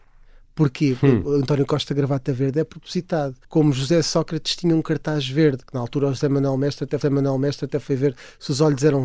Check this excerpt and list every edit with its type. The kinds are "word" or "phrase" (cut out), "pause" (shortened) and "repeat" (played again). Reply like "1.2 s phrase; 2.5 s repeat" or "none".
3.4 s pause; 7.0 s repeat